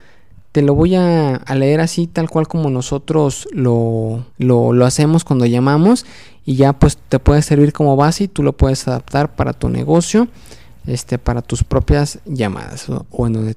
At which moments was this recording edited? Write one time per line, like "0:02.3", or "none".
0:04.3